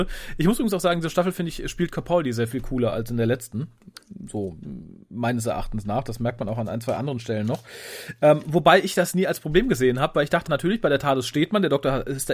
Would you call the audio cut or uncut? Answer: cut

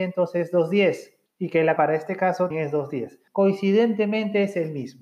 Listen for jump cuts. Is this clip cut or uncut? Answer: cut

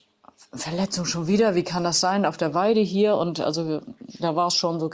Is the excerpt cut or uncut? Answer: uncut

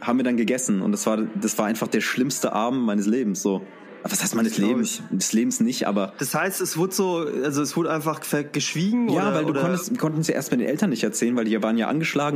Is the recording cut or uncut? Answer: uncut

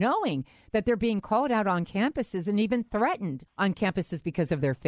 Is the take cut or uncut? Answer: cut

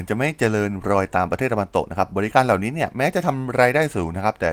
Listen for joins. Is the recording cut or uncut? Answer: uncut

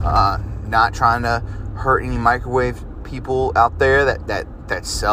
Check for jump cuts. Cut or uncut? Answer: uncut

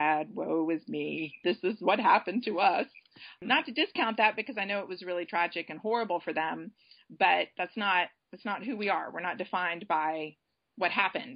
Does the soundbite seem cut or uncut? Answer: uncut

